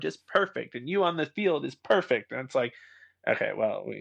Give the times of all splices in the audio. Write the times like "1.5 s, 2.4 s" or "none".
none